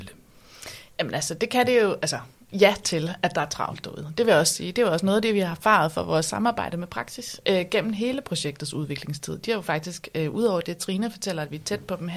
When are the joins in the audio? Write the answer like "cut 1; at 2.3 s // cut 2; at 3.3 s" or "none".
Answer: none